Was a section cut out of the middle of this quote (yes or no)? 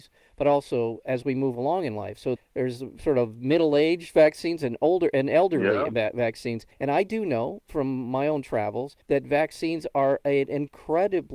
yes